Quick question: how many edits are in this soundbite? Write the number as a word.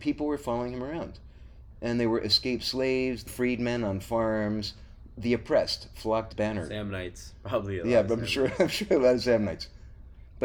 two